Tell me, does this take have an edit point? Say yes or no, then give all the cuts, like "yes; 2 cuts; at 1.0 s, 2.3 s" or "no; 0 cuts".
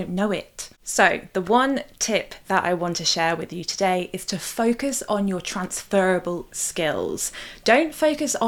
no; 0 cuts